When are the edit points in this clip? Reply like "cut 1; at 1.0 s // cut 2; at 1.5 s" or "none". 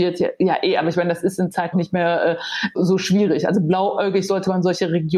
cut 1; at 1.7 s // cut 2; at 2.7 s